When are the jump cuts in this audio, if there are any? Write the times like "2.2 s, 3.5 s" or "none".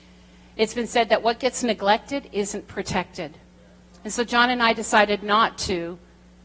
none